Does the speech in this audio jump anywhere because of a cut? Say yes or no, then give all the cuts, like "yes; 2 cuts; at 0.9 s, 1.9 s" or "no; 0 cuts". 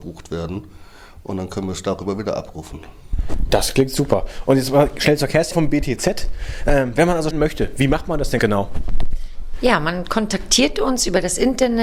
yes; 3 cuts; at 5.5 s, 7.3 s, 8.4 s